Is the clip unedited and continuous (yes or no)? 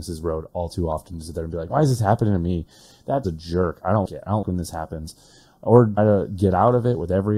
no